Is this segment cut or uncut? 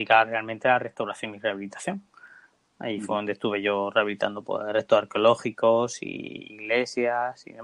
uncut